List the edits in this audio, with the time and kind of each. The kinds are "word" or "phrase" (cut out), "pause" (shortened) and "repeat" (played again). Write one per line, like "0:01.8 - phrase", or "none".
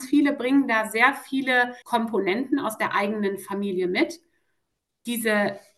0:01.8 - pause